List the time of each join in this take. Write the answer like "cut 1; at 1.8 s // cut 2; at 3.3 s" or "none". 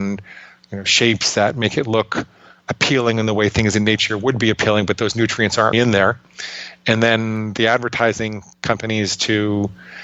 cut 1; at 5.7 s